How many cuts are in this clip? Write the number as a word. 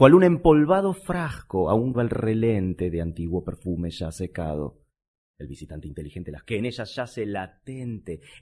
two